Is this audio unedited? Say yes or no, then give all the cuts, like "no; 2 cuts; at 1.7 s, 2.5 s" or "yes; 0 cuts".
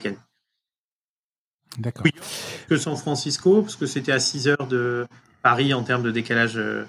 yes; 0 cuts